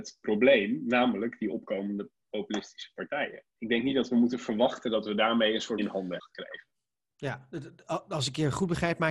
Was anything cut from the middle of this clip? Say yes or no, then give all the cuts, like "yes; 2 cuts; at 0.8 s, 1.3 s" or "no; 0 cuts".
yes; 3 cuts; at 3.5 s, 5.8 s, 6.2 s